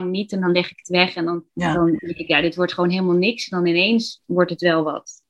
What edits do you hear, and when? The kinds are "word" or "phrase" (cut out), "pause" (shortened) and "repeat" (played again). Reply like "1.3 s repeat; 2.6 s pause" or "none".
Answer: 1.5 s pause